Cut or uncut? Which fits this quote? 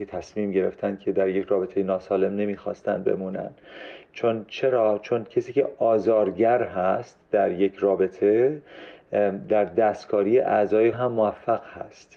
cut